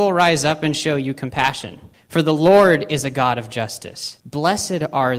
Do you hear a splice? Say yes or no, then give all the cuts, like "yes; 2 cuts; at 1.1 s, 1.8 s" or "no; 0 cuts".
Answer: yes; 2 cuts; at 1.9 s, 4.2 s